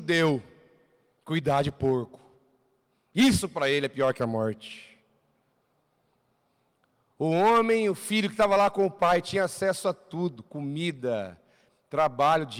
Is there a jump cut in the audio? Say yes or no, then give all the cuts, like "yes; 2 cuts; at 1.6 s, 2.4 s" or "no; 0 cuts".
no; 0 cuts